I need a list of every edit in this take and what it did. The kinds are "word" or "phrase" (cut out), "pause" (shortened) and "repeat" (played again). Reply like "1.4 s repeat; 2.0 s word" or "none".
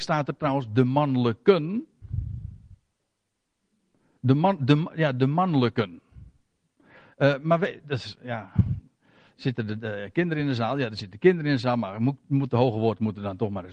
none